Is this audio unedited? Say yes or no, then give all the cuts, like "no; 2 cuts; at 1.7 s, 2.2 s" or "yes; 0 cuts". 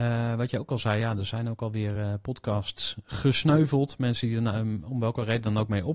yes; 0 cuts